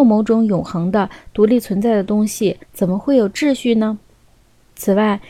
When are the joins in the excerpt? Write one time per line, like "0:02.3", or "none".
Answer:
0:02.6

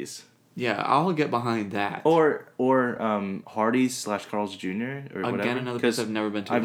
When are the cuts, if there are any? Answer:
none

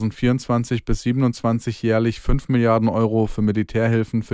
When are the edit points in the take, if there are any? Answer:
none

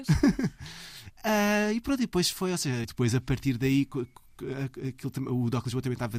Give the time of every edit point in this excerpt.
0:02.8

